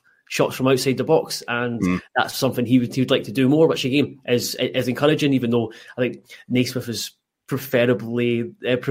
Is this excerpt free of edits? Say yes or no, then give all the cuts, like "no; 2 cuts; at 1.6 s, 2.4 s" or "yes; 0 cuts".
yes; 0 cuts